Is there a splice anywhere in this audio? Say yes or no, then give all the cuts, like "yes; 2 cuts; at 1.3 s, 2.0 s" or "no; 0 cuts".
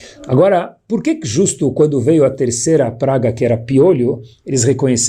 no; 0 cuts